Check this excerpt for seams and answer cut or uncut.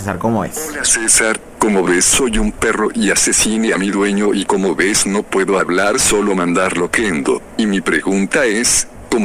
uncut